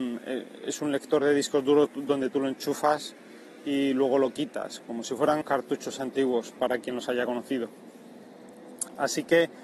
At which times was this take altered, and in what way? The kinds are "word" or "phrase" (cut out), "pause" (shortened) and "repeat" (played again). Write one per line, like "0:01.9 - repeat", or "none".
0:05.0 - phrase
0:05.4 - word